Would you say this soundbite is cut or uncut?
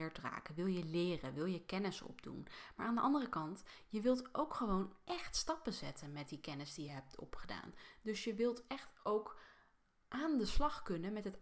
uncut